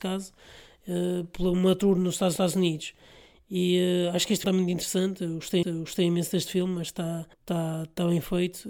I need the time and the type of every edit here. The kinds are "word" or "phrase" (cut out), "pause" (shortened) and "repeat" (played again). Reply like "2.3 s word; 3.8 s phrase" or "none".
2.4 s repeat; 4.4 s word; 5.6 s repeat; 7.3 s pause